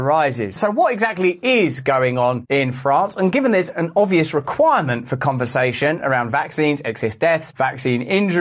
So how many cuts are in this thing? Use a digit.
0